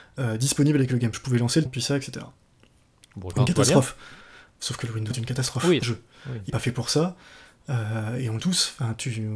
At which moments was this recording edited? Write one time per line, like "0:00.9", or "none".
0:01.1
0:01.7
0:03.3
0:05.1
0:05.8
0:06.5
0:08.4